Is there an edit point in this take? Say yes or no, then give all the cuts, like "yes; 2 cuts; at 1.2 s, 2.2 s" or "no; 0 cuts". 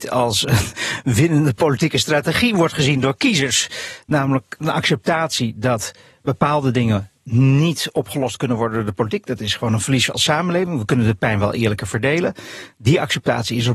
no; 0 cuts